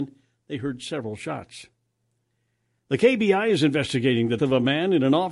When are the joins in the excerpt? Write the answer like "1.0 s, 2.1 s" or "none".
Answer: 4.4 s